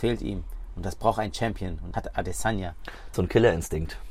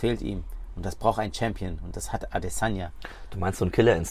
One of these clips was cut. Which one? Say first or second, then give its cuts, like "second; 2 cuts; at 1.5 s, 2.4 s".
first; 2 cuts; at 1.9 s, 3.1 s